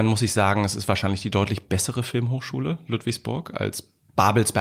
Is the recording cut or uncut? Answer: uncut